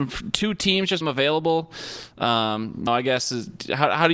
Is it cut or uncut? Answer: cut